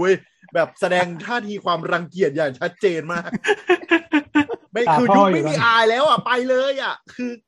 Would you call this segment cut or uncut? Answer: cut